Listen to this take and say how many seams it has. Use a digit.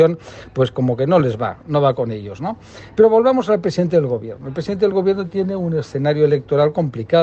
0